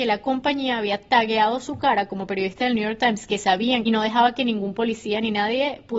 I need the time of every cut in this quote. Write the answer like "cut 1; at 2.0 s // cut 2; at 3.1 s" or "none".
cut 1; at 3.8 s